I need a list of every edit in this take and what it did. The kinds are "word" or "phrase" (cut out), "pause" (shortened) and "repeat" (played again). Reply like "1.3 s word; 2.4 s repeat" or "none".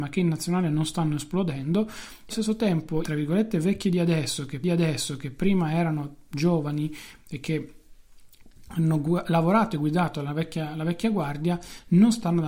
2.3 s word; 3.0 s word; 4.6 s repeat